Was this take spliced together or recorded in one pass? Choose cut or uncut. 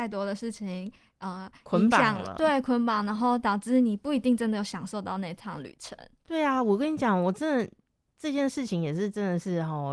uncut